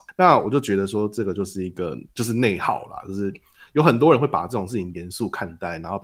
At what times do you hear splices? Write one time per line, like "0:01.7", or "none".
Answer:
0:02.1